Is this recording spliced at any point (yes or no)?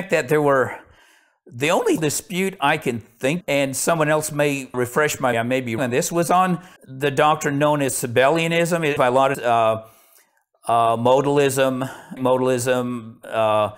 yes